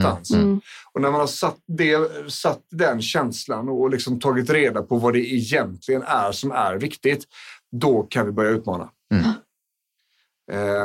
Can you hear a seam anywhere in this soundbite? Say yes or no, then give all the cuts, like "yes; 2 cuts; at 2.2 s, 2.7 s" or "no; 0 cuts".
no; 0 cuts